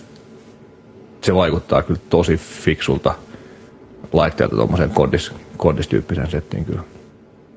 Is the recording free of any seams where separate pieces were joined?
yes; 0 cuts

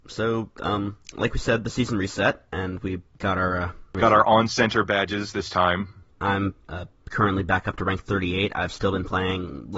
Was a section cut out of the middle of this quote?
yes; 1 cut; at 6.6 s

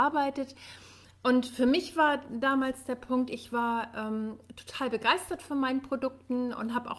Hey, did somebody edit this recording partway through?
no; 0 cuts

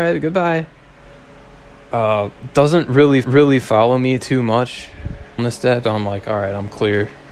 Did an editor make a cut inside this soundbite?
yes; 3 cuts; at 3.2 s, 5.4 s, 5.8 s

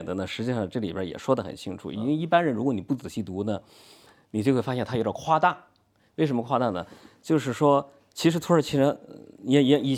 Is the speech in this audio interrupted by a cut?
no; 0 cuts

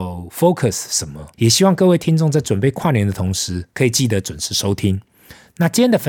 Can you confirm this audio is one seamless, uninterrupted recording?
no; 2 cuts; at 1.3 s, 3.7 s

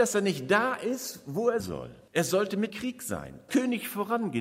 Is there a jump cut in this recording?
yes; 4 cuts; at 1.6 s, 2.1 s, 2.7 s, 3.5 s

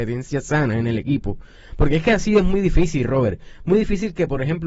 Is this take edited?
no; 0 cuts

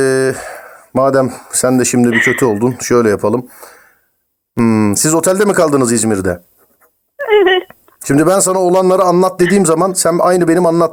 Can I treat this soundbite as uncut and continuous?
yes; 0 cuts

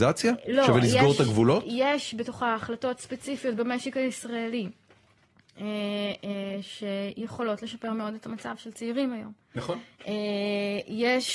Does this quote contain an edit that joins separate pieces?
no; 0 cuts

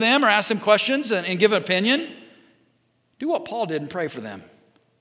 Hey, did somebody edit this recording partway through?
no; 0 cuts

